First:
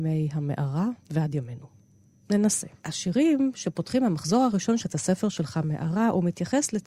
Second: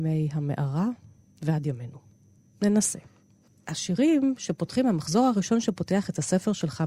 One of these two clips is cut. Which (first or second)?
first